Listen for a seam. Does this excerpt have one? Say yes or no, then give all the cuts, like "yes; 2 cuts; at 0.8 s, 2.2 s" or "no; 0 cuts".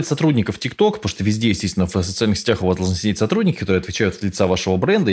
no; 0 cuts